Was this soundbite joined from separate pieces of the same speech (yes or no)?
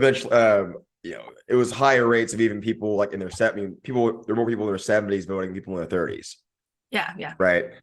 no